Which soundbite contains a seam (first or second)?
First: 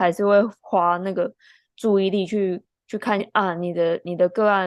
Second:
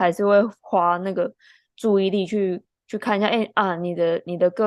first